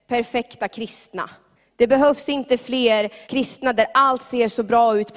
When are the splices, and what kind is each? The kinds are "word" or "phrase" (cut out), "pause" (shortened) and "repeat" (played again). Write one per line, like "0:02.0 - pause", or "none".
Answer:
0:01.6 - pause
0:03.2 - pause